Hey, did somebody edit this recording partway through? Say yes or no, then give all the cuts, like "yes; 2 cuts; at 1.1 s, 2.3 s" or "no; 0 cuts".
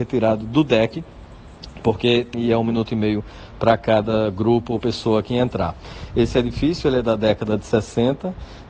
yes; 1 cut; at 2.3 s